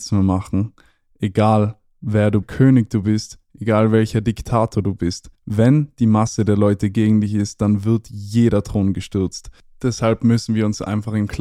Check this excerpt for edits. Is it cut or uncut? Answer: cut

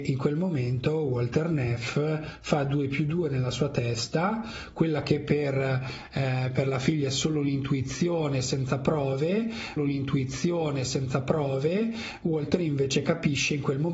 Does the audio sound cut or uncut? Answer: cut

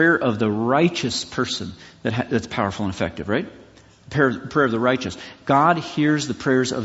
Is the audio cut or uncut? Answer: uncut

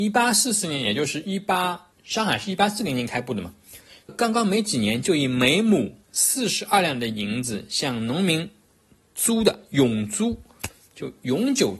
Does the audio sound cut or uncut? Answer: cut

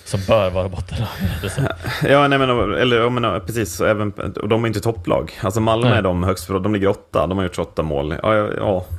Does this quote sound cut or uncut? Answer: uncut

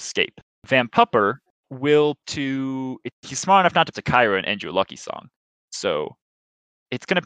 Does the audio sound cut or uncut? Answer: cut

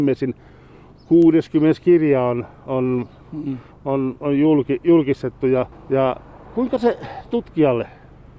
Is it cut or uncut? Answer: cut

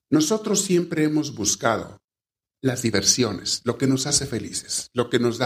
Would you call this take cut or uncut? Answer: uncut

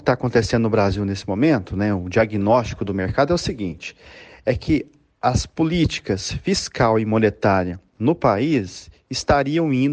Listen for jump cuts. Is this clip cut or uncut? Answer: uncut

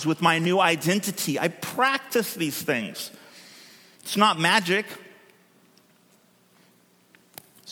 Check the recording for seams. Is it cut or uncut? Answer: uncut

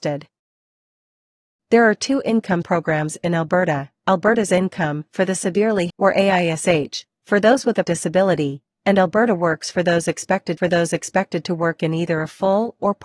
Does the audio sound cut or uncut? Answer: cut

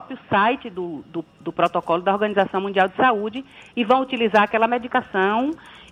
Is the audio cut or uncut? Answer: uncut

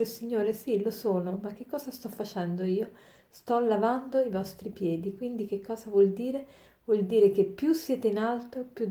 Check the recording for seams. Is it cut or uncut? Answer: uncut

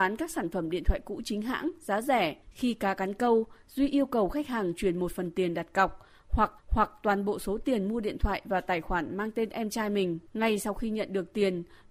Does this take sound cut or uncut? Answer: cut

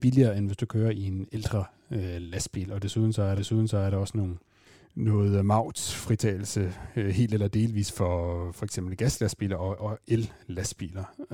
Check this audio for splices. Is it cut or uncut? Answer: cut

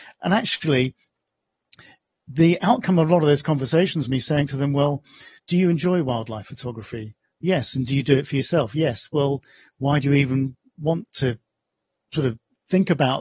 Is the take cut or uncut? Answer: cut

